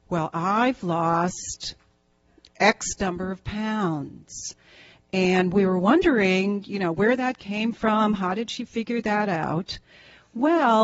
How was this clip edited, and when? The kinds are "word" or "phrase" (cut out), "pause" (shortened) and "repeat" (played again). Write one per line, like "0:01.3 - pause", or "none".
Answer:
none